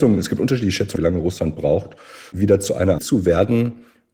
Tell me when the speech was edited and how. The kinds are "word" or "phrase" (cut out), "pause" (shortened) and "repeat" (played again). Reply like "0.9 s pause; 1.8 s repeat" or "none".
1.0 s word; 2.3 s word; 3.0 s word